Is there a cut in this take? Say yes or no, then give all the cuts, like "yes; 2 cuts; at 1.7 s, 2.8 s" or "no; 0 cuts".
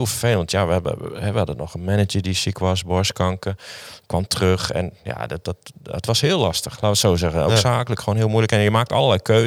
no; 0 cuts